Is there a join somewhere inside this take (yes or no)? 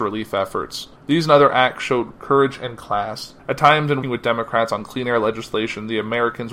yes